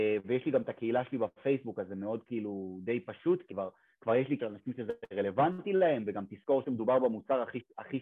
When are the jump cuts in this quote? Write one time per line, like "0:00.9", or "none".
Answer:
0:03.5
0:04.4